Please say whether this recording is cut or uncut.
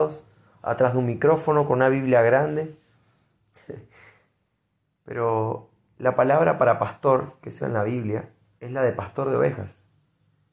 cut